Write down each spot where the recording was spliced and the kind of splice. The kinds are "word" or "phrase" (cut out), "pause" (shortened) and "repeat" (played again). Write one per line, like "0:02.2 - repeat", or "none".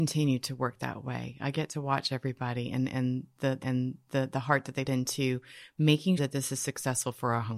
0:03.6 - repeat
0:04.9 - word
0:06.2 - word

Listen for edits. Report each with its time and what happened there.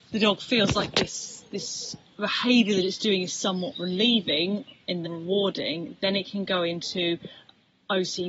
0:05.0 - word

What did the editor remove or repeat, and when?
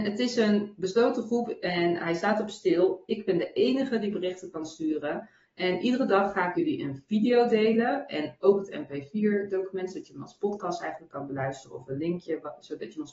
0:06.5 - word

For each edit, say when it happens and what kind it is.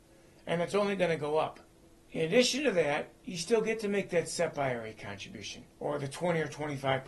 0:01.8 - pause
0:05.7 - pause

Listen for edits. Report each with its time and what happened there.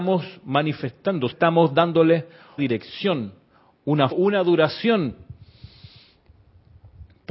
0:01.3 - word
0:02.6 - word
0:04.1 - phrase

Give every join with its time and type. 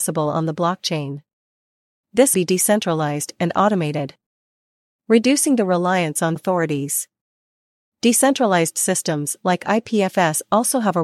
0:02.3 - phrase
0:06.4 - word

